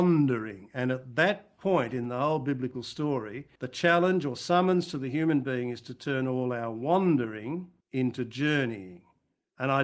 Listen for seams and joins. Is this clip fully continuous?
no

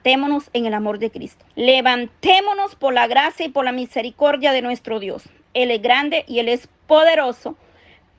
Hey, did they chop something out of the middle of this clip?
yes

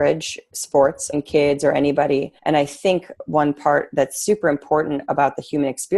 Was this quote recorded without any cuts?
no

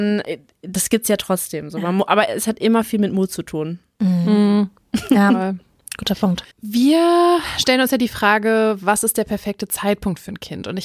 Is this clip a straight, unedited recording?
no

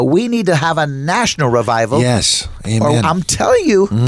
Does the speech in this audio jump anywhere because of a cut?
no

